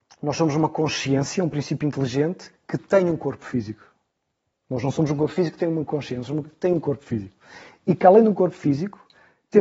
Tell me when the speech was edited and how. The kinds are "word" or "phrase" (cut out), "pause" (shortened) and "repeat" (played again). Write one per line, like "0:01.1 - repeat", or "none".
none